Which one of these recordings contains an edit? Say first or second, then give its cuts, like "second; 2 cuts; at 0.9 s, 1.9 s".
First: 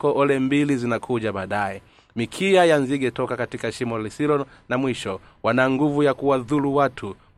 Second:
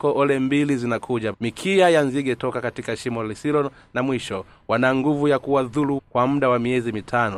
second; 2 cuts; at 1.3 s, 6.0 s